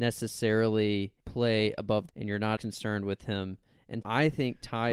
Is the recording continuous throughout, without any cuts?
no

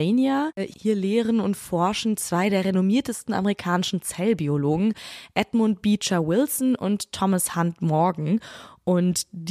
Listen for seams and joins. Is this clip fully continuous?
yes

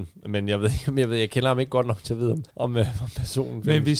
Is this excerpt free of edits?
no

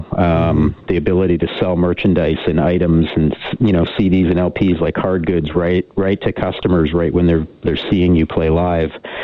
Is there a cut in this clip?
no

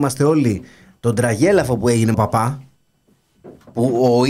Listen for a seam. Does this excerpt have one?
yes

